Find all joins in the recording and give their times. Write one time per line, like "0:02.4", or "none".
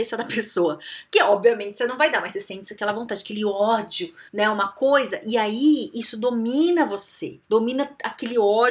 0:04.3
0:07.4